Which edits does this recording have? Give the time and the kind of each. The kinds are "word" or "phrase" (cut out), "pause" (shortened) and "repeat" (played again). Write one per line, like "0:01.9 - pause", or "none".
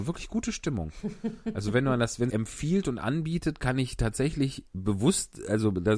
0:02.3 - phrase
0:04.7 - pause